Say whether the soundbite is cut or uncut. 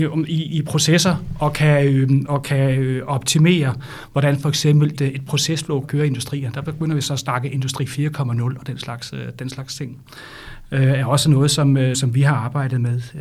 cut